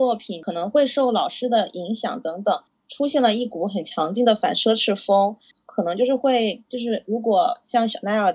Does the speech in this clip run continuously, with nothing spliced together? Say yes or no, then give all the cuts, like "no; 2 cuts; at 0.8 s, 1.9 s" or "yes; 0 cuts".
yes; 0 cuts